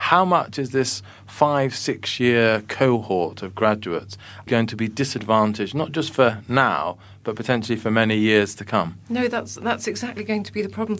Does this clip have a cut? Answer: yes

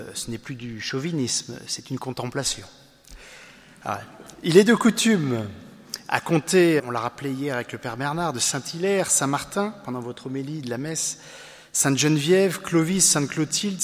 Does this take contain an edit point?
yes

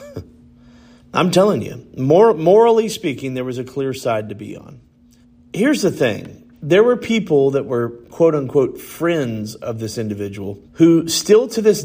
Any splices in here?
yes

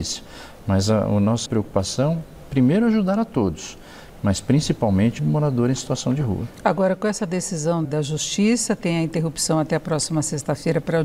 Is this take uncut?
no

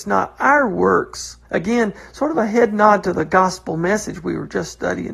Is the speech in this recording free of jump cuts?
no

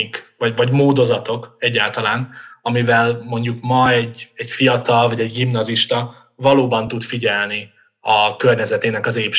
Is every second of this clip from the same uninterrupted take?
yes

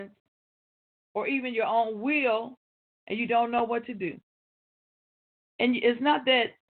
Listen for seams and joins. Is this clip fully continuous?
yes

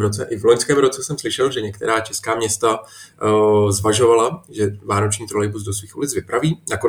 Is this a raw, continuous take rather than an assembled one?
yes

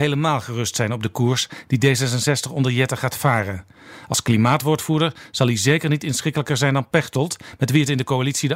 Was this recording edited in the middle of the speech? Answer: no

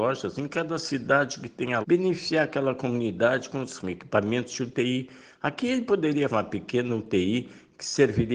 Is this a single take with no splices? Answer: no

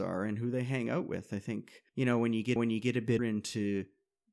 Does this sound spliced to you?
yes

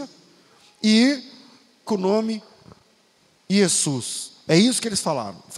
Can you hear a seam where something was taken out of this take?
yes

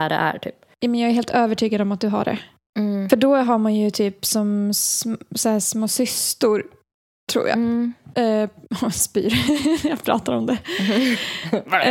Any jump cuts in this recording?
no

